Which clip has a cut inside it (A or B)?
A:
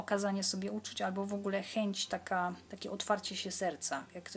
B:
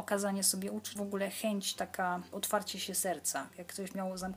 B